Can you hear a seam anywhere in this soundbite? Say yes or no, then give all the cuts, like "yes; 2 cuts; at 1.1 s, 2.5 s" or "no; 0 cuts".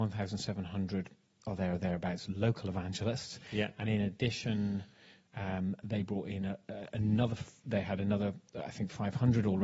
no; 0 cuts